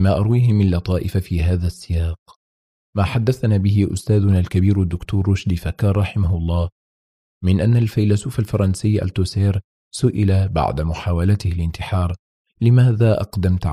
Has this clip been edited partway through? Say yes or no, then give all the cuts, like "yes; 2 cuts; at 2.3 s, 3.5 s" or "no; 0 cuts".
no; 0 cuts